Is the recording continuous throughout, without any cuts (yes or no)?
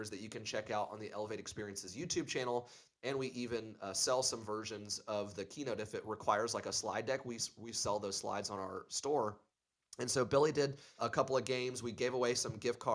no